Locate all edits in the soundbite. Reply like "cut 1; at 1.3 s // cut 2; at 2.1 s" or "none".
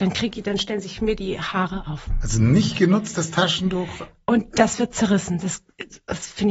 none